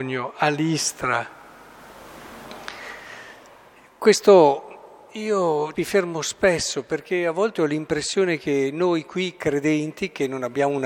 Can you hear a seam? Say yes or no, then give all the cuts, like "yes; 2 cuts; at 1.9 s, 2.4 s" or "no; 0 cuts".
yes; 1 cut; at 5.7 s